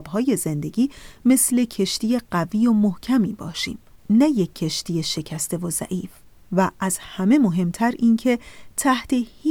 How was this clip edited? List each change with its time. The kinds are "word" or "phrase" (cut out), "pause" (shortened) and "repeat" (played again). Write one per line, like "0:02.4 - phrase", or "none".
none